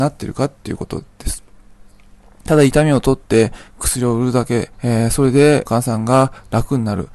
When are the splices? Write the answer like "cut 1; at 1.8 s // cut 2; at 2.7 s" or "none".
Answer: cut 1; at 4.7 s // cut 2; at 5.7 s